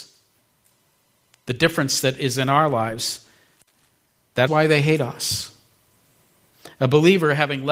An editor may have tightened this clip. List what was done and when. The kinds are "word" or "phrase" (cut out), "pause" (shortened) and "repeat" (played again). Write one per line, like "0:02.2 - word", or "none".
0:04.5 - word